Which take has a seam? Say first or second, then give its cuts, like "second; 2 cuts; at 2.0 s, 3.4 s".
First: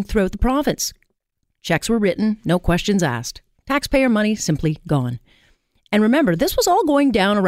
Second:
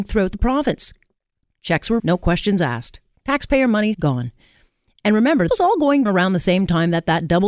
second; 4 cuts; at 2.0 s, 3.9 s, 5.5 s, 6.1 s